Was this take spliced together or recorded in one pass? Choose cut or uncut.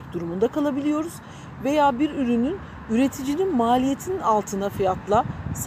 uncut